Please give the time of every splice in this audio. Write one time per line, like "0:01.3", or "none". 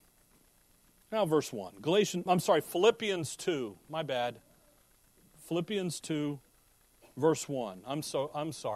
0:02.3